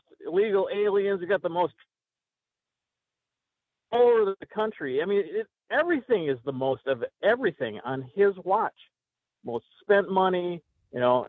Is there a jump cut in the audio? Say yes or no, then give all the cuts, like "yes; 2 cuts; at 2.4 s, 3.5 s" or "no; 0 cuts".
no; 0 cuts